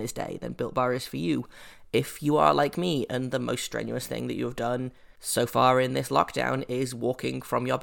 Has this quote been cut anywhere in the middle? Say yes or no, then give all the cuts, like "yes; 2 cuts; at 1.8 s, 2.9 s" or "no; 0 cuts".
yes; 1 cut; at 5.2 s